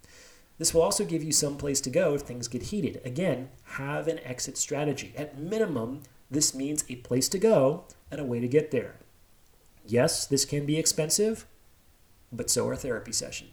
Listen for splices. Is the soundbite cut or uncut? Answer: uncut